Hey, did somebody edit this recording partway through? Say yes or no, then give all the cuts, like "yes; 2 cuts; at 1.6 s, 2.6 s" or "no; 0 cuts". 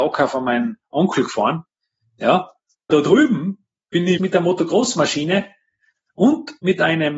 yes; 2 cuts; at 2.9 s, 4.2 s